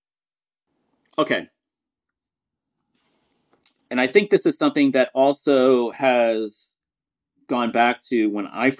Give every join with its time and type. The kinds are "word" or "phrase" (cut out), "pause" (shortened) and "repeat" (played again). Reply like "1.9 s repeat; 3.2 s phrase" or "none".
none